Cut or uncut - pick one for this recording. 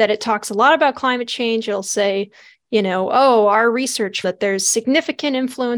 cut